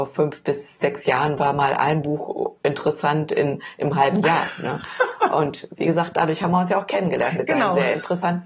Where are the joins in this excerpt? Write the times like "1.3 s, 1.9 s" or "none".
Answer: none